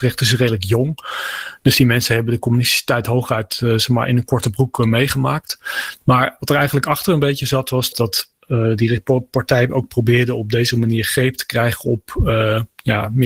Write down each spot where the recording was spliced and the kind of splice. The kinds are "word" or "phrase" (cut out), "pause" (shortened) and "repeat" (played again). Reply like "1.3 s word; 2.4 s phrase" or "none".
7.9 s word

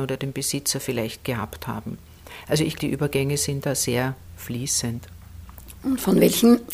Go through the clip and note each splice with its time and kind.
2.7 s word

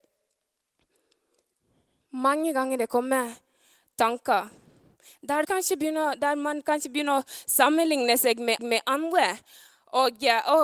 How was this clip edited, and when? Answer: 5.4 s word; 8.6 s repeat

